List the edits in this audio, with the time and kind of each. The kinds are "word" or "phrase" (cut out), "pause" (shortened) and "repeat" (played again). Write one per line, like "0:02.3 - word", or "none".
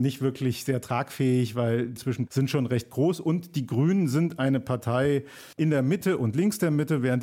0:02.0 - word
0:02.3 - word
0:05.5 - pause